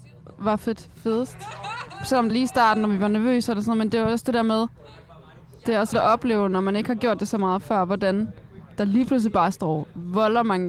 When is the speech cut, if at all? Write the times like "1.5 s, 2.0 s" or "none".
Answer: 2.3 s, 5.9 s